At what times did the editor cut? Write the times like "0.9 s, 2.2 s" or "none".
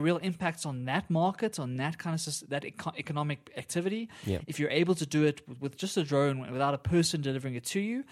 none